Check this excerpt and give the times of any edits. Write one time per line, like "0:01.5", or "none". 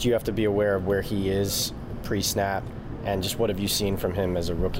none